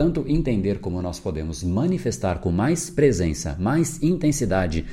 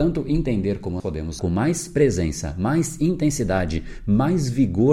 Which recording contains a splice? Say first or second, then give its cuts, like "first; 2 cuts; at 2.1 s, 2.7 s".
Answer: second; 2 cuts; at 1.0 s, 1.4 s